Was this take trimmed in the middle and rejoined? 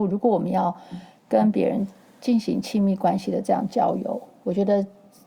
no; 0 cuts

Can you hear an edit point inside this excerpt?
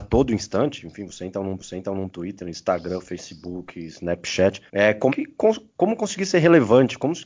yes; 4 cuts; at 1.6 s, 4.7 s, 5.1 s, 5.7 s

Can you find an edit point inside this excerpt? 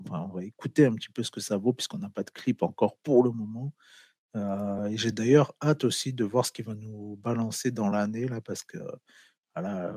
no; 0 cuts

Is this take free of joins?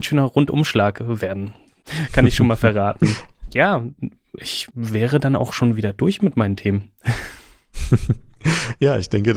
yes; 0 cuts

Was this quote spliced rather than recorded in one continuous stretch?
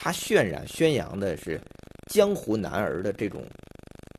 no; 0 cuts

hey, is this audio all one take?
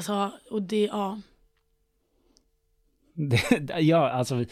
yes; 0 cuts

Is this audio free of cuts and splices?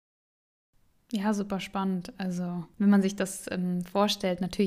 yes; 0 cuts

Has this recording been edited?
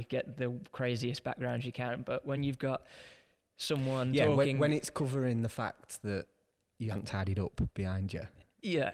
no; 0 cuts

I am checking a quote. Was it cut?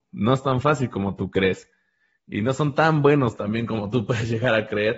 no; 0 cuts

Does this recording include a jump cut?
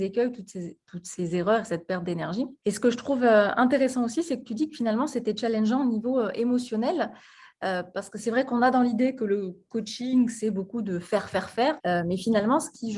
no; 0 cuts

